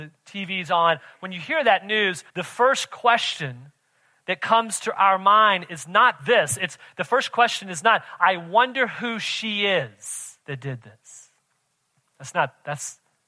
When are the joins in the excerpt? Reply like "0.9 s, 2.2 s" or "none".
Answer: 2.3 s, 10.4 s